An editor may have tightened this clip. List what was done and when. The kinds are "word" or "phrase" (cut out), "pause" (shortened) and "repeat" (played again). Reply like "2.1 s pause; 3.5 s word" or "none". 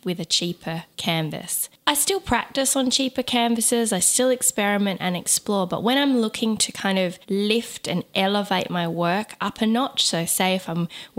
0.9 s pause; 7.2 s pause